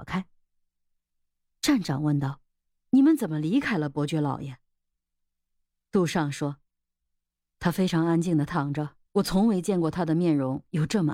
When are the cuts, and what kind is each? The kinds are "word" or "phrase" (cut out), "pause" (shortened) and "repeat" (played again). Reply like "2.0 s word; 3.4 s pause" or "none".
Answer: 2.5 s pause; 9.0 s pause

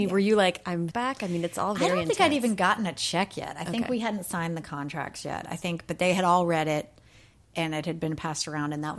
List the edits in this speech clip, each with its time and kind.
0.9 s phrase

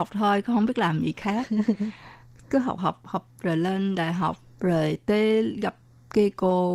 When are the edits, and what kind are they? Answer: 2.8 s word

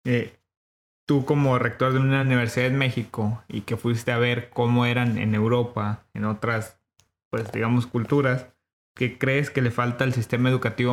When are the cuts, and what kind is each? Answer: none

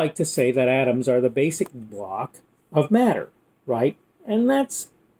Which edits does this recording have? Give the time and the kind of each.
1.9 s word; 2.6 s word

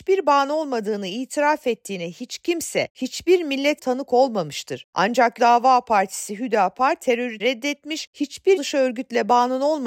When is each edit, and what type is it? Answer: 3.8 s word; 5.4 s word; 7.4 s word; 8.6 s word

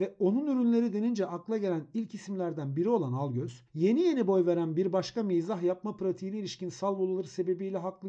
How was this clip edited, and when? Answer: 3.7 s pause

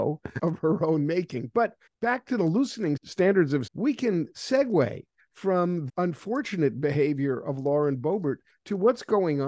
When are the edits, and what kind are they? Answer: 3.7 s word; 5.9 s word

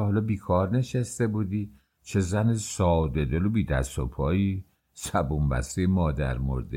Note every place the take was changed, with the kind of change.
none

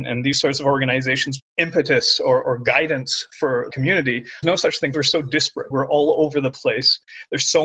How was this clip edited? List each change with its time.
1.4 s phrase; 2.4 s word; 3.7 s word; 4.4 s phrase; 4.9 s phrase; 5.7 s phrase

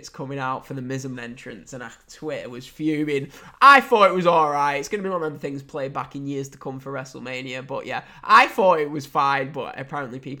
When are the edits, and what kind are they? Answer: 1.1 s word

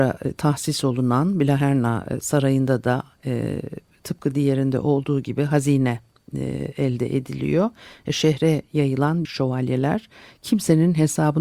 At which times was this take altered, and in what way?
9.2 s word

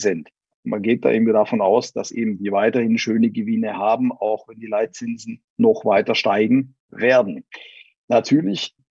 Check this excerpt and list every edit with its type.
none

